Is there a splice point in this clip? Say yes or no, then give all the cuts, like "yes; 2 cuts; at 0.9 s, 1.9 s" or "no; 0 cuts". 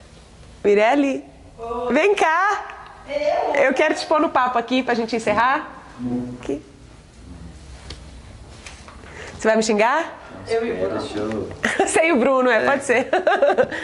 no; 0 cuts